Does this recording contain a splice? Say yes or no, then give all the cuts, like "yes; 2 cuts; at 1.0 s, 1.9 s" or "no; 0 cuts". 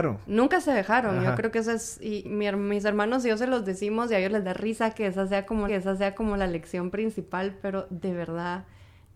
yes; 2 cuts; at 2.2 s, 5.7 s